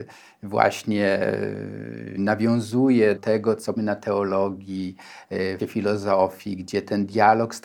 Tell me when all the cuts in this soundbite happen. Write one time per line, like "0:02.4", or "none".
0:02.2
0:03.2
0:03.8
0:05.6